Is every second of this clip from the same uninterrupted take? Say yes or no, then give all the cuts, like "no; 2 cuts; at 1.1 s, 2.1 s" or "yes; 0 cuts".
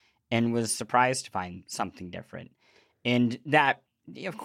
yes; 0 cuts